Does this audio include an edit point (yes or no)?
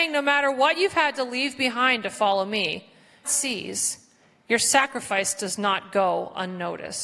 yes